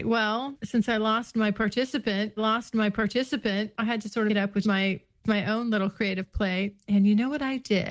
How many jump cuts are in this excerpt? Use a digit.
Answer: 4